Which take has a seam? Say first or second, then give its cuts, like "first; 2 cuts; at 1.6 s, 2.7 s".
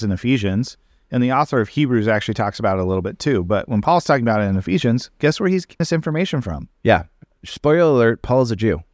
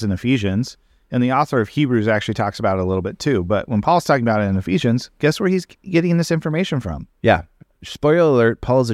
first; 1 cut; at 5.8 s